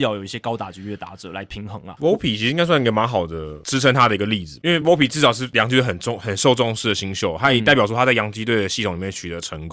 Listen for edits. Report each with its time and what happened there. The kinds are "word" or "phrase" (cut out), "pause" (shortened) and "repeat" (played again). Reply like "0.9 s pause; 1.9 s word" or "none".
none

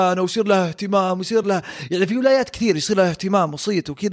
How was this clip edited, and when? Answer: none

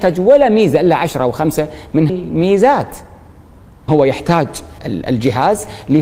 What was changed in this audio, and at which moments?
2.1 s word; 3.9 s word; 4.8 s word

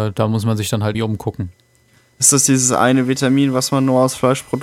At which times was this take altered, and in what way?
0.9 s word

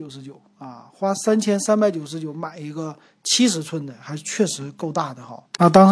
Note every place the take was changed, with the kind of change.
none

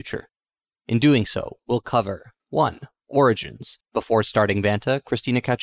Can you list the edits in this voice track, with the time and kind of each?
2.4 s pause; 3.8 s pause

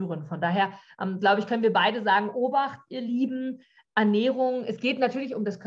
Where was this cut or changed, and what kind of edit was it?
none

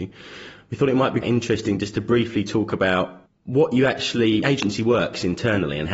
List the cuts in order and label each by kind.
1.2 s word; 4.4 s phrase

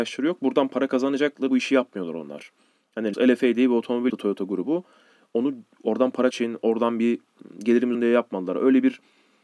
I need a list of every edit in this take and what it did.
1.5 s word; 3.1 s word; 4.1 s word; 6.3 s word; 7.9 s word

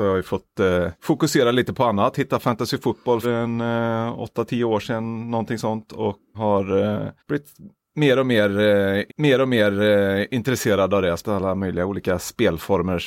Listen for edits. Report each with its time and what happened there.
1.0 s pause; 3.2 s word; 6.3 s word; 7.2 s pause; 9.1 s repeat; 11.2 s word

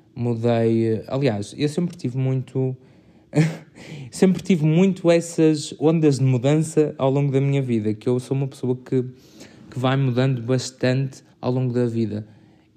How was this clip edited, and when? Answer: 11.3 s pause

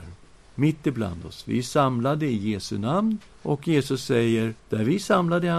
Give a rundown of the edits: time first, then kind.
3.3 s pause; 4.6 s pause

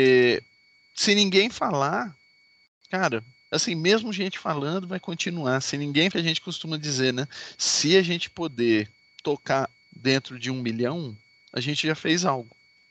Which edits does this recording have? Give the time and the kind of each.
6.1 s phrase; 9.8 s word

